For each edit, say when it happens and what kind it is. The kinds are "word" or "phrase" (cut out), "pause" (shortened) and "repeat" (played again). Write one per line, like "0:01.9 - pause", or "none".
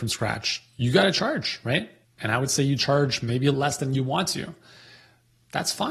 0:02.0 - pause
0:03.5 - phrase